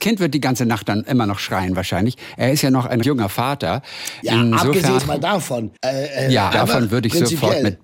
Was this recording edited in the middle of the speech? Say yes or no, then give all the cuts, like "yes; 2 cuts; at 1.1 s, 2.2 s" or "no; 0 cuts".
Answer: yes; 4 cuts; at 3.0 s, 5.0 s, 5.8 s, 6.5 s